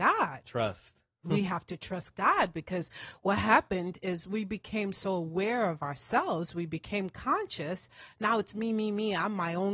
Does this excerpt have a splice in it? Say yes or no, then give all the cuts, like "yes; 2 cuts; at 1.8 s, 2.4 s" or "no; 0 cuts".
no; 0 cuts